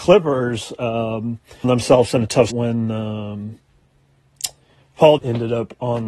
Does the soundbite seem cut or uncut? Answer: cut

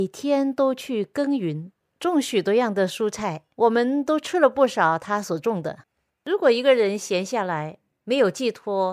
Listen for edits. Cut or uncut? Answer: cut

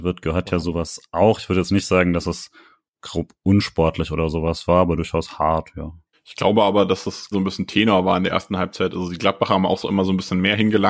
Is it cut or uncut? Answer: cut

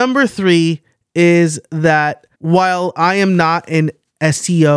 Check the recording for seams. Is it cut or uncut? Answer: cut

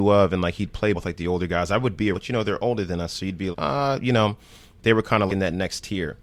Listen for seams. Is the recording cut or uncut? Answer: cut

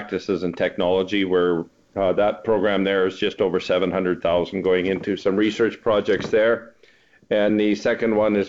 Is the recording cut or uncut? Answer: cut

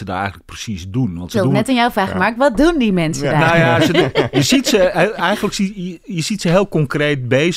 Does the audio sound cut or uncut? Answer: uncut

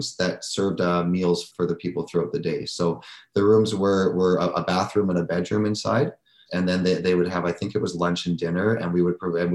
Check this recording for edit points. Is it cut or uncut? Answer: uncut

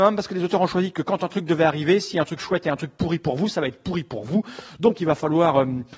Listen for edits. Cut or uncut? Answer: uncut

